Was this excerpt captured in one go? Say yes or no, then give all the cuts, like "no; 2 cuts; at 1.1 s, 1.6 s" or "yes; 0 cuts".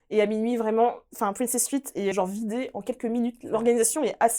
no; 1 cut; at 2.1 s